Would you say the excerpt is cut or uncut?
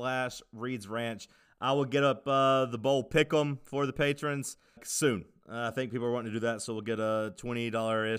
cut